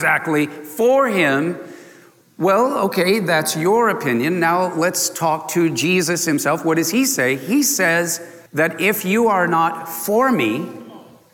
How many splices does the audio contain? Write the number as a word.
one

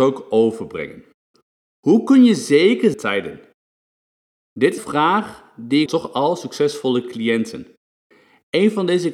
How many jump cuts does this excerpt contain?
four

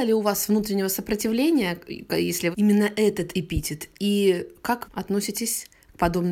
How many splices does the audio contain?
two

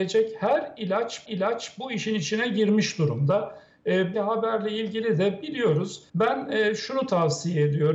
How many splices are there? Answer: three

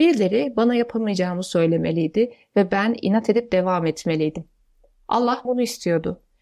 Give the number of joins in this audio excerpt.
one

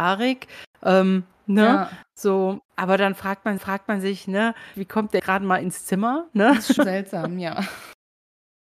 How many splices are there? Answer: five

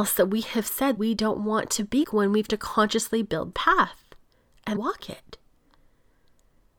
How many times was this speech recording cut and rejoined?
five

